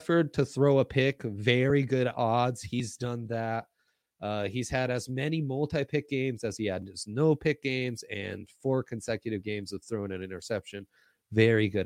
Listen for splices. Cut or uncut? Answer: uncut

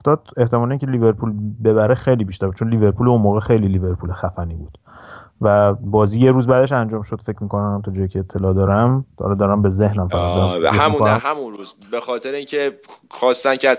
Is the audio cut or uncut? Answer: cut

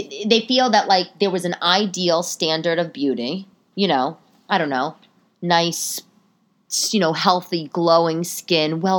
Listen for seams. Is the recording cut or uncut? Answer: uncut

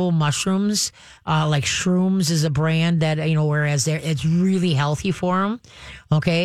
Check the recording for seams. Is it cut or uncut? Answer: uncut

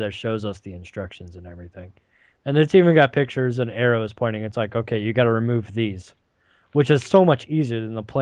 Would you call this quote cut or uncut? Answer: uncut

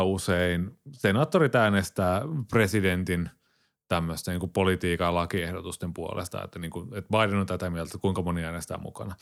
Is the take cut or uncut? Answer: uncut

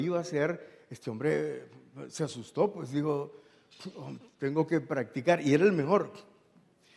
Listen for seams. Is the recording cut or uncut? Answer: uncut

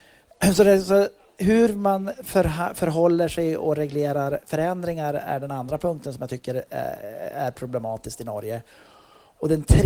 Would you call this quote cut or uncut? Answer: uncut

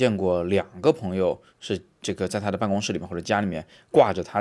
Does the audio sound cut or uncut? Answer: cut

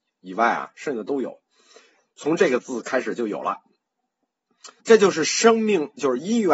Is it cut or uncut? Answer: cut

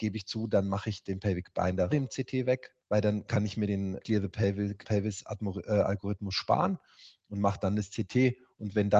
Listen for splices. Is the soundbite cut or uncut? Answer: cut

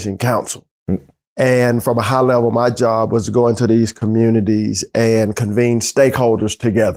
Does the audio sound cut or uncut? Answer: uncut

